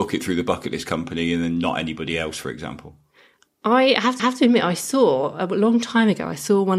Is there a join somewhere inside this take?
yes; 1 cut; at 4.2 s

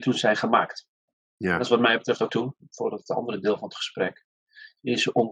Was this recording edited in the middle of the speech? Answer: yes; 1 cut; at 2.3 s

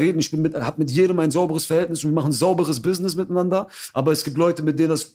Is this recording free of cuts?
yes; 0 cuts

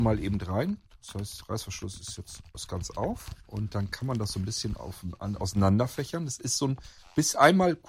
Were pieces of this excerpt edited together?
yes; 1 cut; at 2.5 s

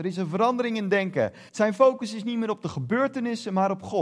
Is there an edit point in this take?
yes; 1 cut; at 1.5 s

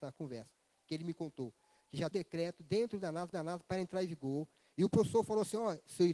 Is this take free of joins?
no; 2 cuts; at 2.1 s, 3.3 s

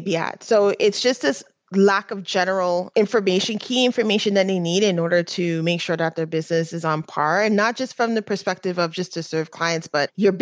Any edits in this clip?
no; 0 cuts

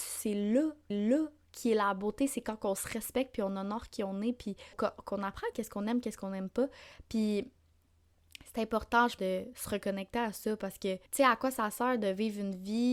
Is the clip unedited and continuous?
no; 5 cuts; at 0.9 s, 4.7 s, 5.5 s, 9.2 s, 11.1 s

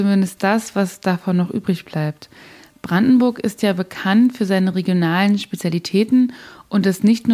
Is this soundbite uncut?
yes; 0 cuts

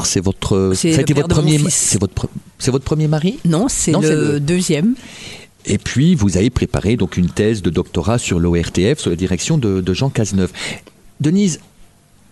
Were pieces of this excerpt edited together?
no; 0 cuts

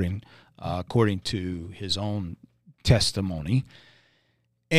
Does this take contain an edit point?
no; 0 cuts

